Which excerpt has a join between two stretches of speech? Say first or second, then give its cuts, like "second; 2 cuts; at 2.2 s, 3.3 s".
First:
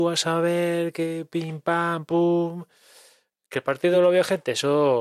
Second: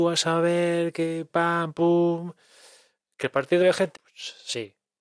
second; 3 cuts; at 1.3 s, 3.6 s, 3.9 s